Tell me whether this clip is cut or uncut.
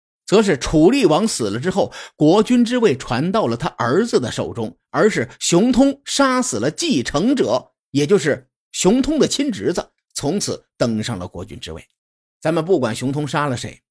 cut